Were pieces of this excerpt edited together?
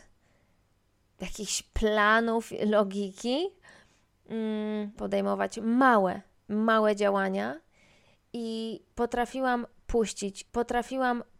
yes; 3 cuts; at 5.0 s, 6.4 s, 10.5 s

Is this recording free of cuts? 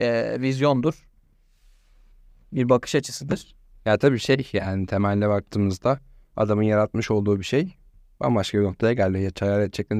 yes; 0 cuts

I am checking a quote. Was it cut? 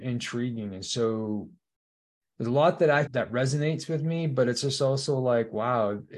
yes; 2 cuts; at 2.0 s, 3.1 s

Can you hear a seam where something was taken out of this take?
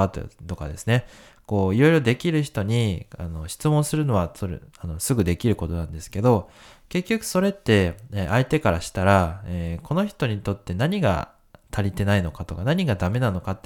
no; 0 cuts

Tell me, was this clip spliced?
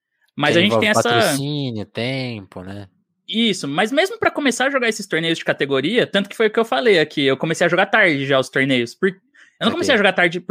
no; 0 cuts

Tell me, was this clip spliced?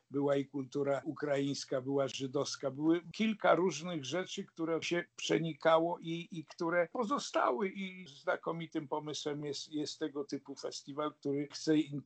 no; 0 cuts

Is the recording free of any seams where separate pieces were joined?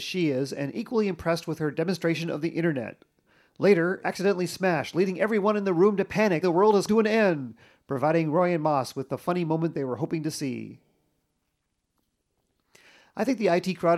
no; 3 cuts; at 4.0 s, 6.4 s, 6.9 s

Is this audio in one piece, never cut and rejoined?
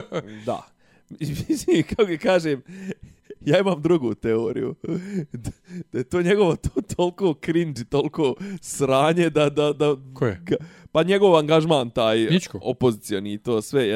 yes; 0 cuts

